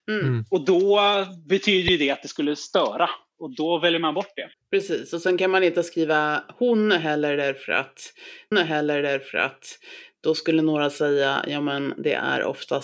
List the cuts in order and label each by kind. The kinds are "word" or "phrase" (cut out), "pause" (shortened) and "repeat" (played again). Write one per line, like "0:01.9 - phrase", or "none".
0:04.5 - pause
0:08.5 - repeat